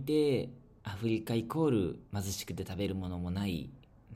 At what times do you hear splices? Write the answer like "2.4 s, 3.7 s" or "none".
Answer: 2.1 s